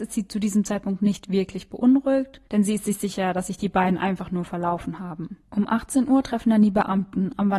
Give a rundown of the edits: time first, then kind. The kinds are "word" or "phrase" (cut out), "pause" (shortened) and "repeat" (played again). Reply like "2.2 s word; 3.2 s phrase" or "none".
2.5 s pause; 5.4 s pause